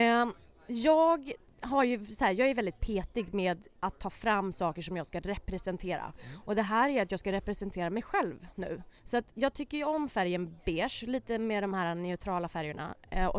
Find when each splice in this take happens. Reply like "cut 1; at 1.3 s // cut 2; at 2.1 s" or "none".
cut 1; at 3.8 s // cut 2; at 9.0 s